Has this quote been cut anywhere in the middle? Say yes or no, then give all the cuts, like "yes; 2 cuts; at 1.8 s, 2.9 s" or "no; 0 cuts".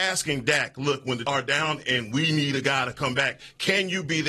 yes; 2 cuts; at 1.2 s, 1.8 s